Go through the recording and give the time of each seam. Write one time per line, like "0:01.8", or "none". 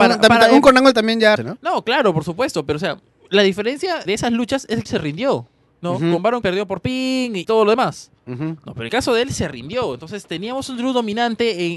0:01.4
0:04.1
0:04.9
0:06.4
0:07.4
0:08.9